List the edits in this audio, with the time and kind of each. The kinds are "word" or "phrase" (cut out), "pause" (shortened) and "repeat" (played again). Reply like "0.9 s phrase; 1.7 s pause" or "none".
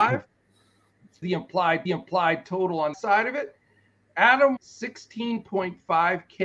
1.2 s word; 1.9 s repeat; 2.9 s word; 4.6 s word